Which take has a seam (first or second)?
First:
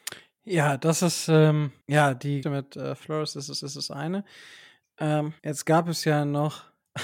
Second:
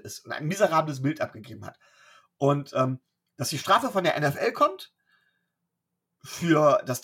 first